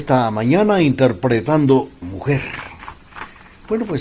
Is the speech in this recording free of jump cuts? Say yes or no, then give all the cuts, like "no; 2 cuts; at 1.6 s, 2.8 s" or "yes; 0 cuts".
no; 1 cut; at 2.0 s